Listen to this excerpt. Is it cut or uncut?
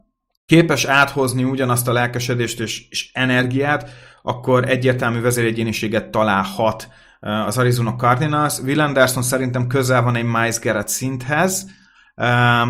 uncut